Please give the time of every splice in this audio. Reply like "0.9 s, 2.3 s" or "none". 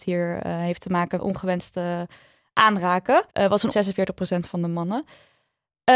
1.2 s, 3.3 s, 3.7 s